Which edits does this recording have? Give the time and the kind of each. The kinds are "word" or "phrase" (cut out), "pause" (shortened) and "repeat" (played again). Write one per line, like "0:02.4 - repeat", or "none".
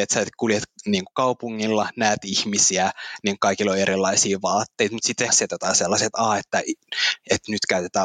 0:05.3 - phrase